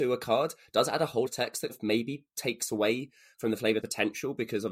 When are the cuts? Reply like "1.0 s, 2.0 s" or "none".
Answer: 1.3 s, 1.7 s, 3.8 s